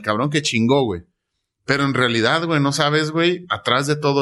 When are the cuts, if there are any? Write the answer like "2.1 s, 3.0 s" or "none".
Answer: none